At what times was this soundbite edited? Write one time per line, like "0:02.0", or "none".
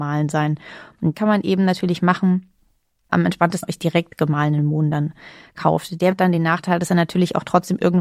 0:01.1
0:03.6
0:06.1